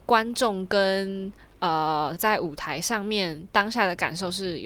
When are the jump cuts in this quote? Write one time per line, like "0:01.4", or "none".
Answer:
0:02.2